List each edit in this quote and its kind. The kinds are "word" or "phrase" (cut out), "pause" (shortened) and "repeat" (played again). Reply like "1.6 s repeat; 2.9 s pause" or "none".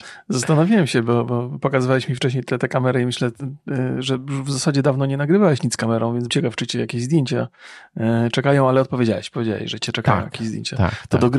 6.3 s word

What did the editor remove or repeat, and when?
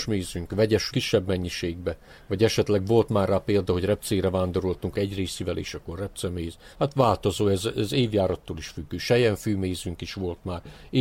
0.9 s phrase; 4.9 s word; 6.7 s pause

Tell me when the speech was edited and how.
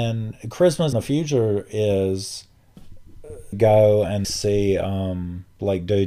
0.9 s word; 3.5 s word; 4.2 s word

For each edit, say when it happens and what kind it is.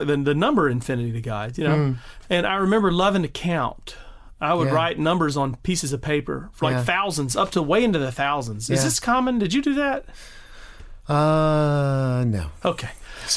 none

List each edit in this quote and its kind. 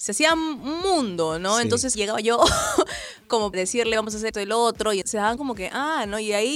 1.9 s word; 3.5 s word; 3.9 s word; 4.3 s word; 5.0 s word; 5.4 s word

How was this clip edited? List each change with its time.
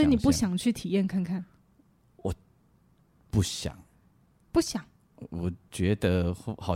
none

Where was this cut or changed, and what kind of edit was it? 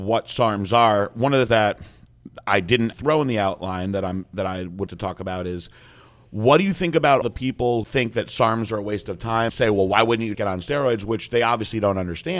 1.5 s word; 2.9 s word; 4.9 s word; 7.2 s word; 7.8 s word; 9.5 s word; 10.3 s word

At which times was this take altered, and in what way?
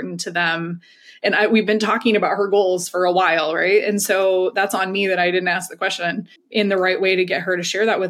6.4 s pause

